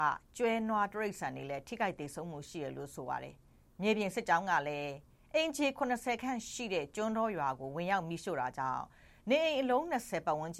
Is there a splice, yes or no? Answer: no